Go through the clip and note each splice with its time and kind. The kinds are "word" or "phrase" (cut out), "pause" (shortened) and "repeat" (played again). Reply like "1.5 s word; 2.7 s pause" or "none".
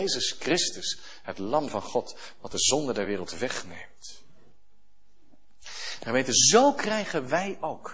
none